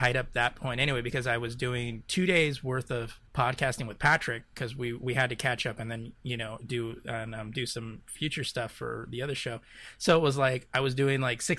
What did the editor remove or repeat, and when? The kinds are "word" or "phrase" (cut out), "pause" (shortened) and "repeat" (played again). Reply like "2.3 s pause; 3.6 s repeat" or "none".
3.3 s pause